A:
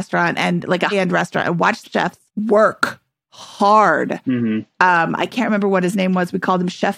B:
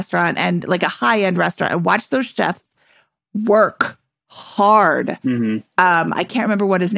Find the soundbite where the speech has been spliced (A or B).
A